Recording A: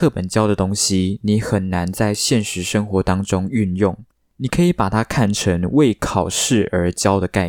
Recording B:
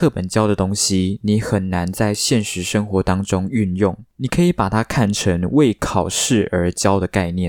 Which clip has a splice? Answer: B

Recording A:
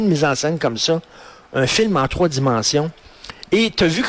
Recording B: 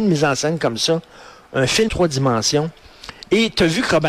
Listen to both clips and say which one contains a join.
B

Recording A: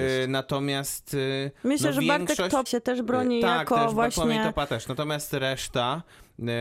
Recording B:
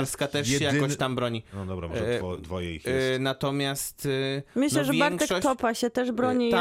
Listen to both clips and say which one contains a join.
A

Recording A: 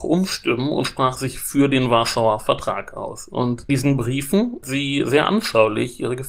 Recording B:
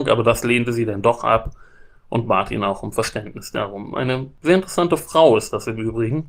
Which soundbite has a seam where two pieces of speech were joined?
A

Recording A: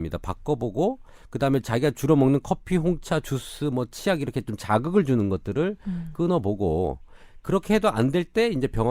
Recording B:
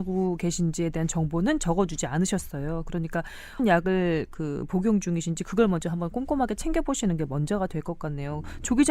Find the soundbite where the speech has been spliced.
B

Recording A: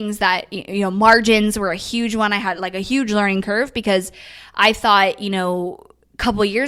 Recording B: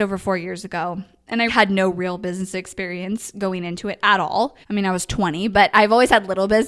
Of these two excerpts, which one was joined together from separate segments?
B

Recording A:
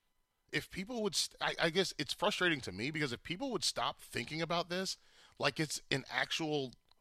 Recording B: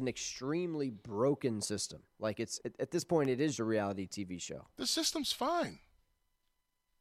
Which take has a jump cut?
B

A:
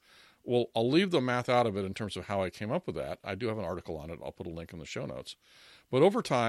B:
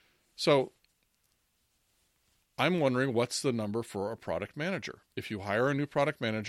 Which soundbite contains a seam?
B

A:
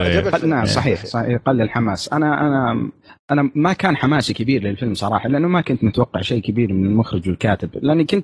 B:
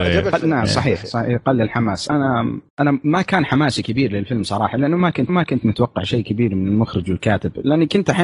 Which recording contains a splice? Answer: B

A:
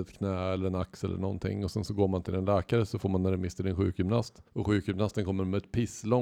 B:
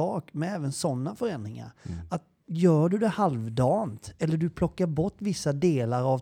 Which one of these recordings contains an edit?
A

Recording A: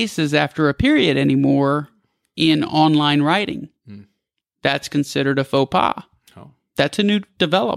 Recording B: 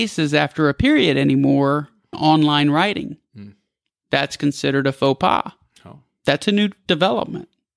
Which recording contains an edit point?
B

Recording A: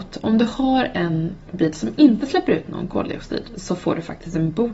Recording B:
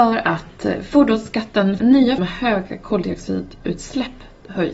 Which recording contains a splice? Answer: B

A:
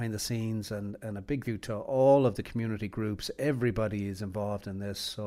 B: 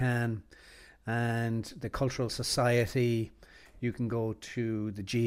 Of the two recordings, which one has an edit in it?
A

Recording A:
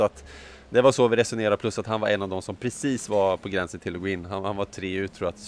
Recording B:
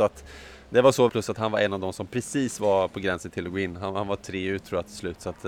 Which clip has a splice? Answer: B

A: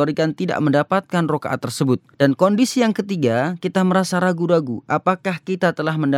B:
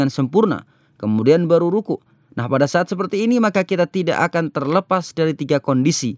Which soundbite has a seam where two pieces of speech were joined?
A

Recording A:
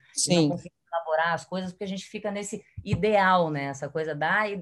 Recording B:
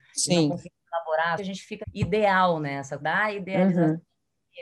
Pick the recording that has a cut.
B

